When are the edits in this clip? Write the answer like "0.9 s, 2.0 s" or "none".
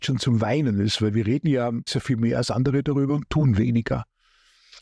1.9 s